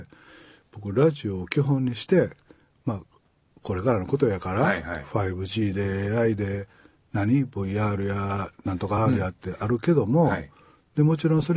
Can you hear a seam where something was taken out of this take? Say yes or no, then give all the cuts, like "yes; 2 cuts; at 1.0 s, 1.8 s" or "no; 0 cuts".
no; 0 cuts